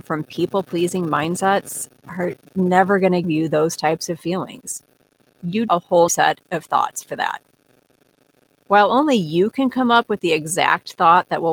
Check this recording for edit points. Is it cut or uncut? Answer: cut